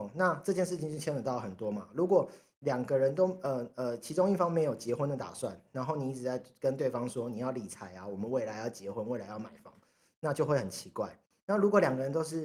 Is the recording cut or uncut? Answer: uncut